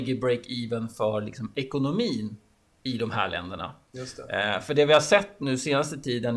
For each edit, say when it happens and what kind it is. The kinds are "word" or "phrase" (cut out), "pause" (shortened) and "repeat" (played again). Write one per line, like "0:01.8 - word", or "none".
none